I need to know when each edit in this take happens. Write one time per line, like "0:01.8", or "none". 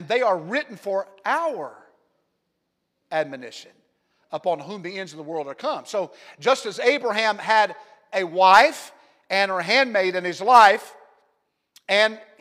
none